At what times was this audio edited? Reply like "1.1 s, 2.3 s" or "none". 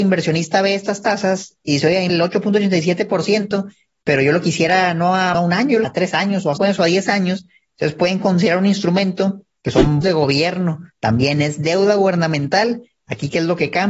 2.1 s, 5.3 s, 5.8 s, 6.6 s, 10.0 s, 10.9 s

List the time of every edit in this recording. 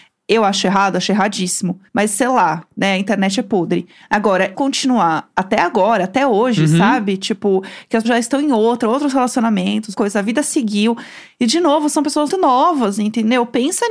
1.9 s, 4.5 s, 8.0 s, 9.9 s, 12.3 s

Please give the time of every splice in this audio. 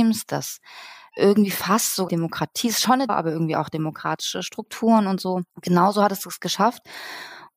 1.1 s, 2.1 s, 3.1 s, 5.5 s

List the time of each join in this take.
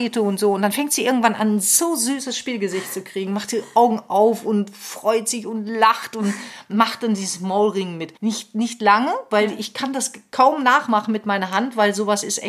8.2 s

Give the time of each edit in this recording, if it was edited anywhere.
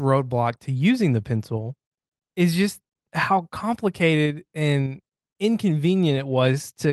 2.0 s, 3.0 s

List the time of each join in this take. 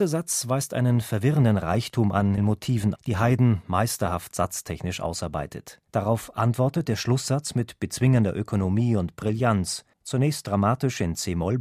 2.4 s, 3.0 s, 5.9 s, 9.9 s

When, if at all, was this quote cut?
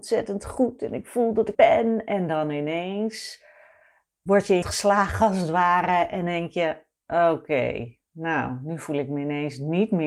1.5 s, 4.6 s, 8.1 s

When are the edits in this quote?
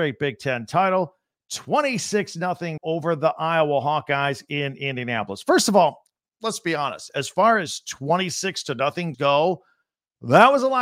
2.8 s, 9.1 s

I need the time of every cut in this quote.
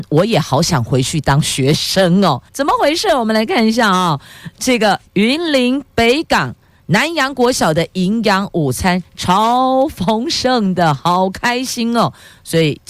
2.5 s, 5.1 s

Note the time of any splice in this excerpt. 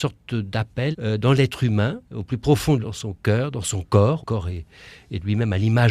0.9 s, 2.0 s, 2.8 s, 4.2 s

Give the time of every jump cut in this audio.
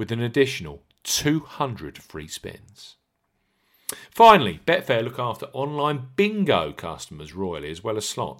none

